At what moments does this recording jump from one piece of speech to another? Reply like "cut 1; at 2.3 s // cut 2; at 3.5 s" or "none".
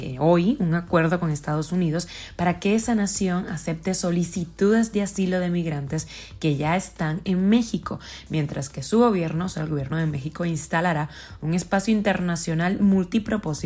none